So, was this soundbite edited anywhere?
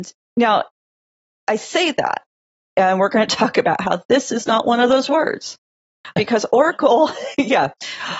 yes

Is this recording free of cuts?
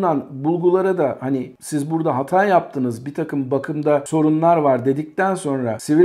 yes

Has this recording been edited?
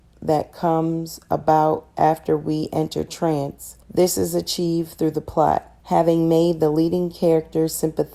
yes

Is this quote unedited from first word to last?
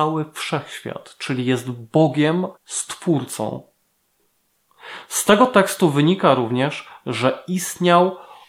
no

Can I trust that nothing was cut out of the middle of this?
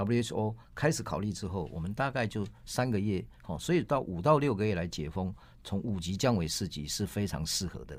yes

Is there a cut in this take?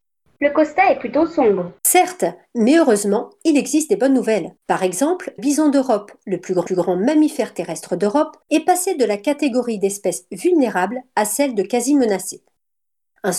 yes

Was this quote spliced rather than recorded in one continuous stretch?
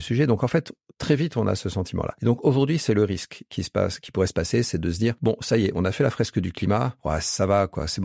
no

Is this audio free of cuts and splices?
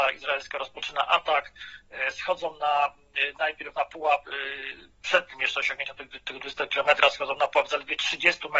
yes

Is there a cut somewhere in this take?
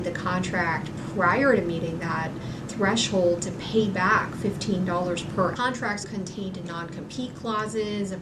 yes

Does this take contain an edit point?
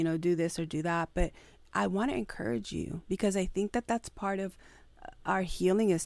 no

